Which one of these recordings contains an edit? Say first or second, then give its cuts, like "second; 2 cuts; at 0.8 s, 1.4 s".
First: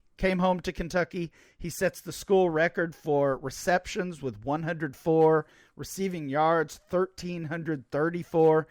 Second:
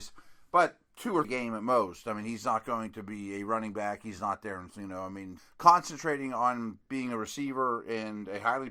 second; 3 cuts; at 1.2 s, 4.7 s, 5.4 s